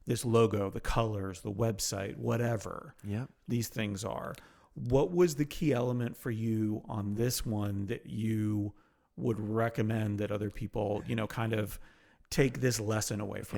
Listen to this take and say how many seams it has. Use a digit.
0